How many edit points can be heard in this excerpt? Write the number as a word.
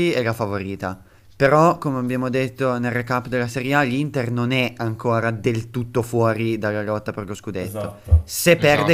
one